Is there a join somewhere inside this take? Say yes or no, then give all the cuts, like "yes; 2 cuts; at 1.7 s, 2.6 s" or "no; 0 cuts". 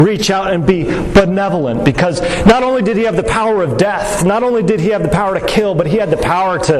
no; 0 cuts